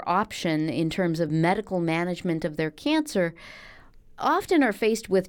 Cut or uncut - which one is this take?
uncut